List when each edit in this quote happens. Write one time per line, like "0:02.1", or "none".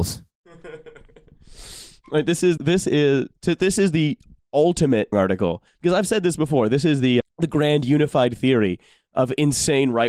0:02.6
0:05.1
0:07.2